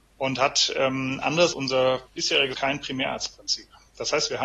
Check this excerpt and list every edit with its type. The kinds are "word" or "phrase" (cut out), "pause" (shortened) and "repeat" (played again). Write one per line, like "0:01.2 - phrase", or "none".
0:01.5 - word
0:02.5 - word